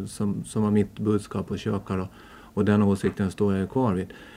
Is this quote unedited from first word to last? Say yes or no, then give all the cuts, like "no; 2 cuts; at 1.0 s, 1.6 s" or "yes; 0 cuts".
yes; 0 cuts